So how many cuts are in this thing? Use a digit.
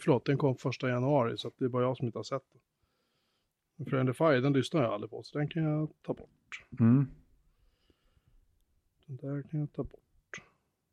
0